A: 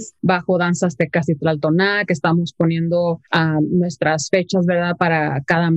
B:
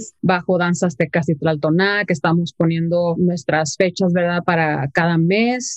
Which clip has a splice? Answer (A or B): B